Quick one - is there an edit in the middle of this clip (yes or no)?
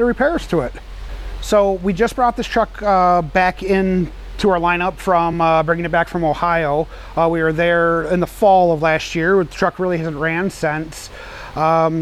no